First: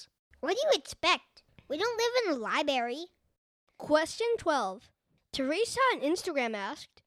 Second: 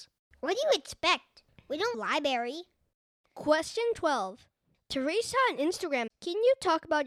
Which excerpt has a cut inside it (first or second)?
second